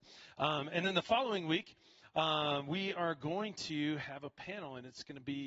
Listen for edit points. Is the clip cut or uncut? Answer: uncut